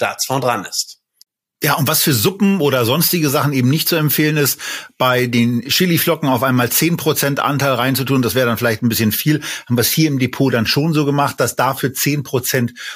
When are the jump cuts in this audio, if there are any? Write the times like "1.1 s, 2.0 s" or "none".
none